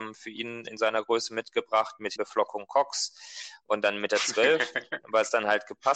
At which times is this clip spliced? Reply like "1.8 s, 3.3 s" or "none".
2.2 s